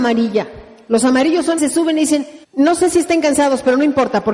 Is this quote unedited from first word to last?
no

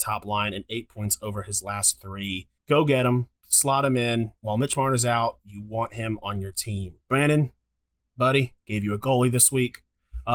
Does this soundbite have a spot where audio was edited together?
yes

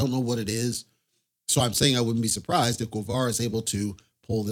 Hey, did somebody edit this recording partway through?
no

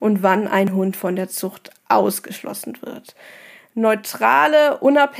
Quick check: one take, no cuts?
yes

